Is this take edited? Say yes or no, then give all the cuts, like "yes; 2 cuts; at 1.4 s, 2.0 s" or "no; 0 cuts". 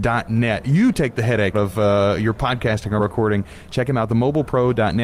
yes; 2 cuts; at 1.5 s, 3.0 s